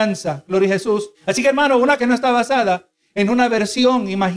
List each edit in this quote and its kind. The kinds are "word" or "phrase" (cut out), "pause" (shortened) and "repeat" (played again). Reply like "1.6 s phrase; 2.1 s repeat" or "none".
1.1 s pause; 2.0 s word